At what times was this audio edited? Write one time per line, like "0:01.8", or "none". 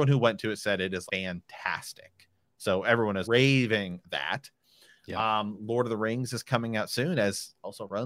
0:01.1
0:03.2
0:04.0